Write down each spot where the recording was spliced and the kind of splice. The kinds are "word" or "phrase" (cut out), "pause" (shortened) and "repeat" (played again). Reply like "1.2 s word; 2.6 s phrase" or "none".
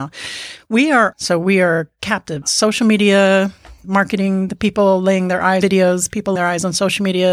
1.1 s phrase; 3.8 s word; 5.6 s word; 6.4 s word